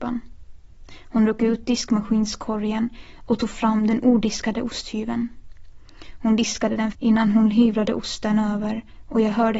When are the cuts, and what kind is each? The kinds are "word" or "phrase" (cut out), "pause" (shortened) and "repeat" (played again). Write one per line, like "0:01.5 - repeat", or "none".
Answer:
0:06.9 - phrase